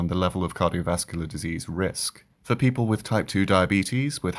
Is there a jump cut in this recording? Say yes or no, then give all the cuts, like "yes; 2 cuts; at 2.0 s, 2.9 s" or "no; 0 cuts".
yes; 1 cut; at 2.3 s